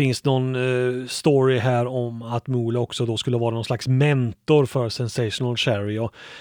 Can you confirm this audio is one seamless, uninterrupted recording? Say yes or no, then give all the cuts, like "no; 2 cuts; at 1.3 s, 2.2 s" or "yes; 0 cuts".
yes; 0 cuts